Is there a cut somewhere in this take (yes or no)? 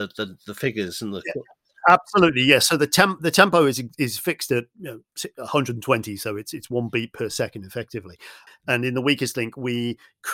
no